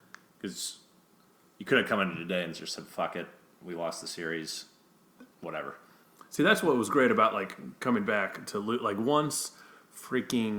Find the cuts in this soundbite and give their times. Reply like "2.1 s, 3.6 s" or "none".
5.3 s